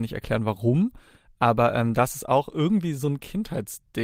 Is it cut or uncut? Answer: uncut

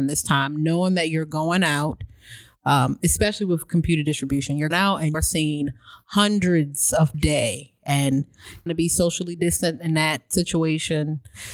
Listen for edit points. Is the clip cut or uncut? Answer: cut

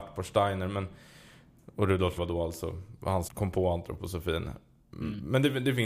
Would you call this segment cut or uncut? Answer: cut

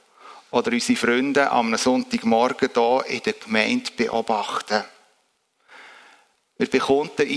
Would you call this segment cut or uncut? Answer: uncut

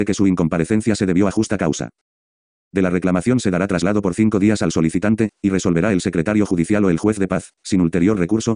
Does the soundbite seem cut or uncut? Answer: uncut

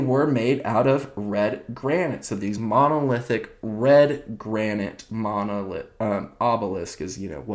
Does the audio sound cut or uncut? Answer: uncut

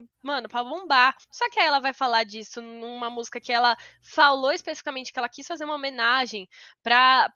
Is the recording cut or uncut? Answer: cut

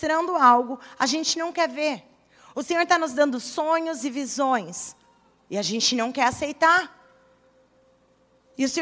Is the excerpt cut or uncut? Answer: uncut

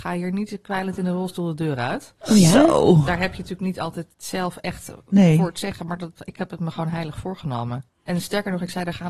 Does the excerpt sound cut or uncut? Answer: cut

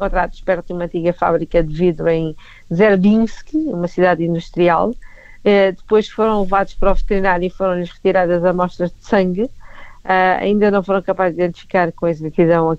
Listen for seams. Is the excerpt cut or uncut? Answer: uncut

